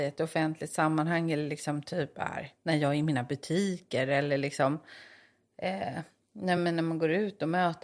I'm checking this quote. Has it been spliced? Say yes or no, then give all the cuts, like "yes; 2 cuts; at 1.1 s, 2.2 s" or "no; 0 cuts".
no; 0 cuts